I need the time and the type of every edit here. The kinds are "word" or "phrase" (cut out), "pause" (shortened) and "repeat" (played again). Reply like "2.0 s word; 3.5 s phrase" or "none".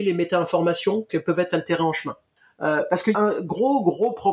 1.1 s word; 3.1 s phrase